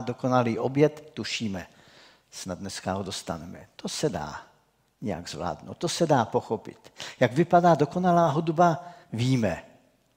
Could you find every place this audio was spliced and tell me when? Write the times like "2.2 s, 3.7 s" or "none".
9.0 s